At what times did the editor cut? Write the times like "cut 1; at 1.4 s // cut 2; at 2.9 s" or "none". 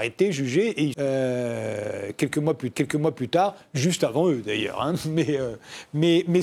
cut 1; at 0.9 s // cut 2; at 2.7 s